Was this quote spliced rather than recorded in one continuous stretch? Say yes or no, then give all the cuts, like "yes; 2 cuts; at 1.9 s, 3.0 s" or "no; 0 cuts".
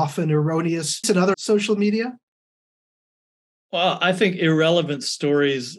yes; 2 cuts; at 1.0 s, 1.3 s